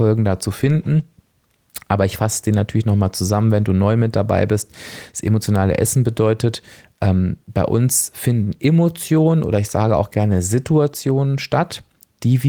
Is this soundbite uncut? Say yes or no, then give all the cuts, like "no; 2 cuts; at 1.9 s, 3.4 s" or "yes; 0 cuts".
yes; 0 cuts